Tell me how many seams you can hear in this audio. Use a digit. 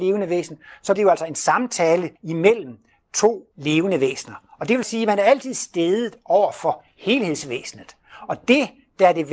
4